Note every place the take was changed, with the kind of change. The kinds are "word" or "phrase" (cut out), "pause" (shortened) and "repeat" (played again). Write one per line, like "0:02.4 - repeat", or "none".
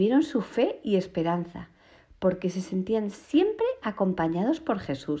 none